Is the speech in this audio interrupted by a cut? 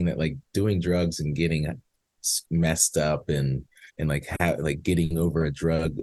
yes; 1 cut; at 3.9 s

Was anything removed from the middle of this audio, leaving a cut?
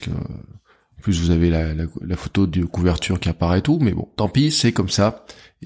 no; 0 cuts

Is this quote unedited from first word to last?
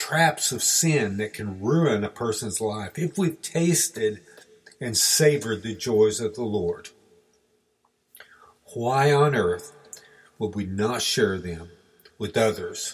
yes; 0 cuts

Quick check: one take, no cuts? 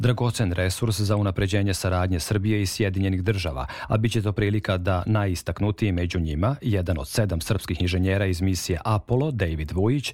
yes; 0 cuts

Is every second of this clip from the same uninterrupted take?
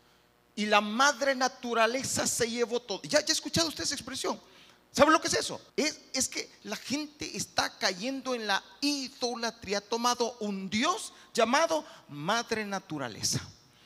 no; 1 cut; at 5.7 s

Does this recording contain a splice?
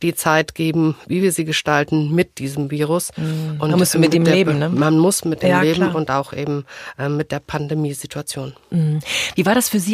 no; 0 cuts

